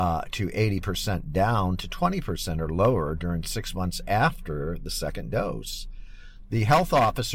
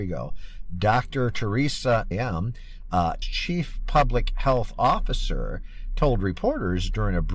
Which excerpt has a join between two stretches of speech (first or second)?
second